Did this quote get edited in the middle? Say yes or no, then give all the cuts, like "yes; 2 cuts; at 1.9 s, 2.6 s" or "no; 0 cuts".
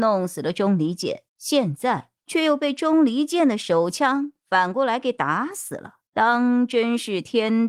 yes; 3 cuts; at 1.3 s, 2.2 s, 6.1 s